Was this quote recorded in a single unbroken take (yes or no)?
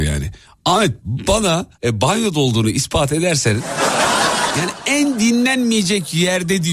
no